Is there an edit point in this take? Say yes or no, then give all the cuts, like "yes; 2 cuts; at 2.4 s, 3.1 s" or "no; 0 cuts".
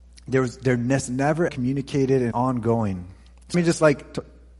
yes; 3 cuts; at 1.5 s, 2.3 s, 3.5 s